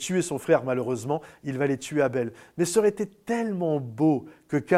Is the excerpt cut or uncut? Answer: uncut